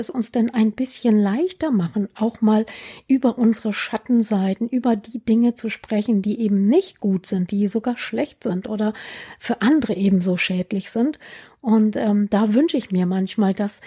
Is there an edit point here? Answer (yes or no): no